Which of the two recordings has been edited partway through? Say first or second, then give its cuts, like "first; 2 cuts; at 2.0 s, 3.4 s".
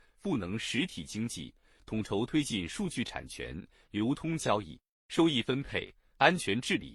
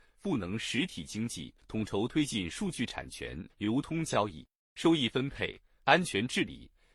second; 2 cuts; at 1.6 s, 3.5 s